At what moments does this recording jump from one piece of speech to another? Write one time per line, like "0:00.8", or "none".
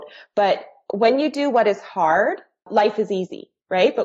none